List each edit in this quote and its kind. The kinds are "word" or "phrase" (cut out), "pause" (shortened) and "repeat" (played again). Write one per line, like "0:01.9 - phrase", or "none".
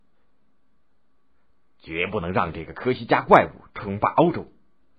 none